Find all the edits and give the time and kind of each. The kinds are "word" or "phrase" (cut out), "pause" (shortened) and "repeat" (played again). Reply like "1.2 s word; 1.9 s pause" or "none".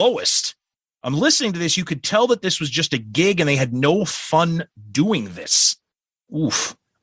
none